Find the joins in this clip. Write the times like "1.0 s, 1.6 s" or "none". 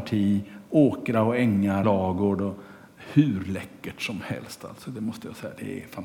1.8 s